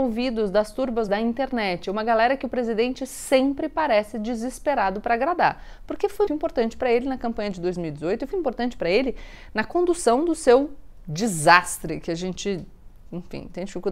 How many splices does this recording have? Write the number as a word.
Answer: three